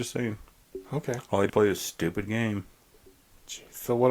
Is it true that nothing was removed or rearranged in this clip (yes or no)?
no